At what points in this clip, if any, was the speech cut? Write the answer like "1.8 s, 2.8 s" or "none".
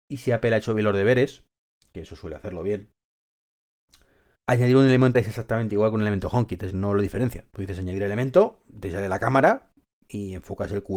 4.4 s, 5.1 s, 6.7 s